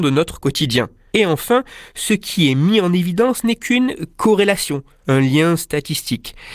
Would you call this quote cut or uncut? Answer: uncut